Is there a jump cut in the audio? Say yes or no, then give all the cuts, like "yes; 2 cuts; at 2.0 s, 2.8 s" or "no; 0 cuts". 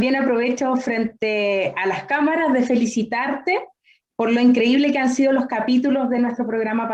no; 0 cuts